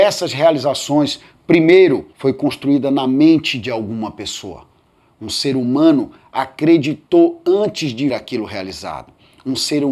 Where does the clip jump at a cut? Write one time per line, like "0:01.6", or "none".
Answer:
0:08.1

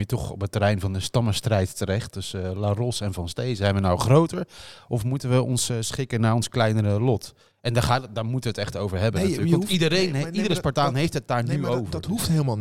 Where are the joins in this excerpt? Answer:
0:07.5

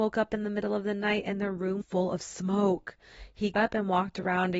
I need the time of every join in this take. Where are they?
0:01.8
0:03.5

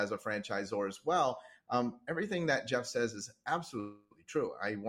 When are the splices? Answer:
none

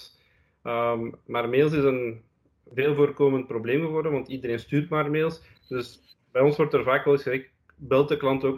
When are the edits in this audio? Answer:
none

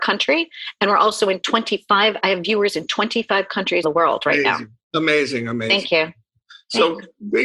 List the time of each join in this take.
0:03.8

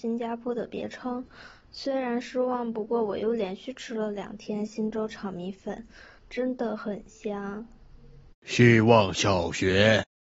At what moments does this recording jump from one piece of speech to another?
0:06.2
0:08.4

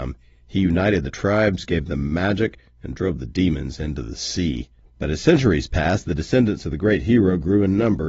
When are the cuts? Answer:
0:04.8

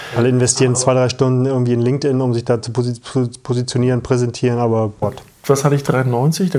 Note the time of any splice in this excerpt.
0:05.0

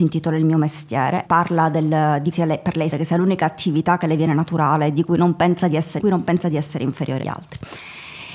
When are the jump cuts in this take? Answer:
0:01.2
0:02.3
0:02.9
0:06.0
0:07.2

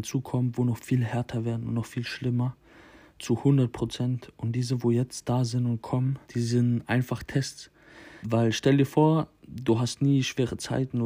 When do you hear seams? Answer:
0:06.2
0:08.2

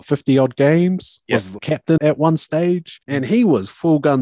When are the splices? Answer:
0:01.6
0:02.0
0:03.0

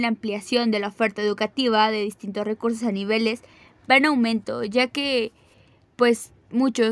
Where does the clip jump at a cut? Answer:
none

